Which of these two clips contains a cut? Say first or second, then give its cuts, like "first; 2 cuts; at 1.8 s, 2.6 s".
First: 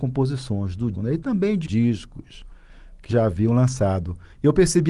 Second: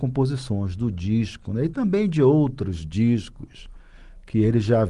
first; 3 cuts; at 0.9 s, 1.6 s, 3.1 s